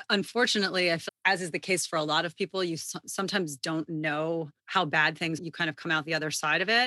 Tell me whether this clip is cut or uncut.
cut